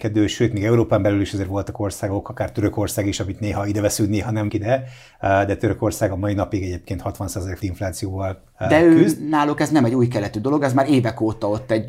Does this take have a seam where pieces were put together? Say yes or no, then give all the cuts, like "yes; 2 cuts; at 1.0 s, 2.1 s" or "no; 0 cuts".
yes; 2 cuts; at 4.5 s, 7.6 s